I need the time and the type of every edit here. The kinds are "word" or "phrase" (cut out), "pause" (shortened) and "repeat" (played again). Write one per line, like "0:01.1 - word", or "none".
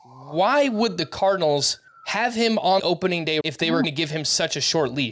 0:01.9 - pause
0:02.8 - word
0:03.4 - word
0:03.8 - word